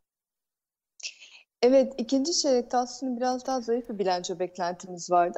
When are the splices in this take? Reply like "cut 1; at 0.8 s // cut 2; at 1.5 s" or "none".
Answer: none